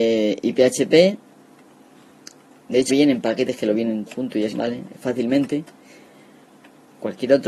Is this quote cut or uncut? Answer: cut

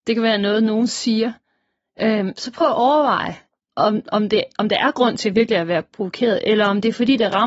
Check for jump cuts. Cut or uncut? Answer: uncut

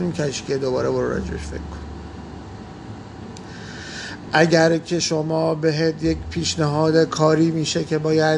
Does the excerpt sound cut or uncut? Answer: uncut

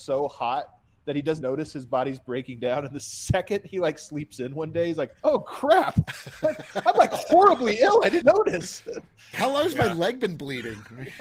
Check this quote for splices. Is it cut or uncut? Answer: cut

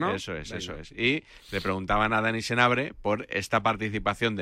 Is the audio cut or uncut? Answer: uncut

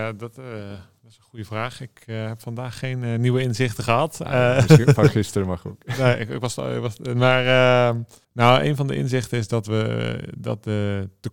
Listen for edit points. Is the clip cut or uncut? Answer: cut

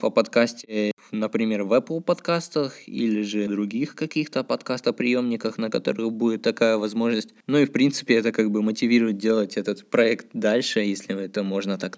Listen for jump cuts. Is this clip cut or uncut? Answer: cut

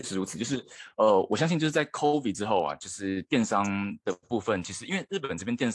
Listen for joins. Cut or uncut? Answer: uncut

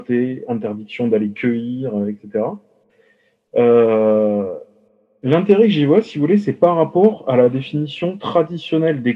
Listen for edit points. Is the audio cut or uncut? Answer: uncut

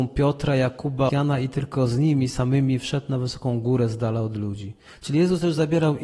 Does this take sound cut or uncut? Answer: cut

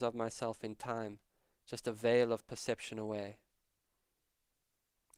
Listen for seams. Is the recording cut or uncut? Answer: uncut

